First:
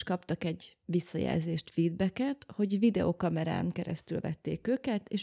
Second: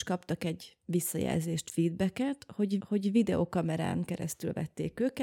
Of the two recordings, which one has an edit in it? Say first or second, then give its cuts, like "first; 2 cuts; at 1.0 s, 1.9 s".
second; 1 cut; at 2.8 s